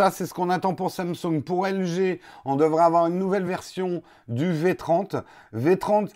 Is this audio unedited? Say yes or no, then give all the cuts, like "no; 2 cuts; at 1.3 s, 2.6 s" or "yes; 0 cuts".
yes; 0 cuts